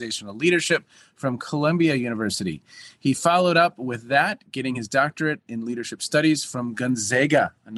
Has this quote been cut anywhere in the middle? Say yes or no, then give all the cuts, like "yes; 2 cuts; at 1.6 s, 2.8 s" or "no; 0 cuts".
no; 0 cuts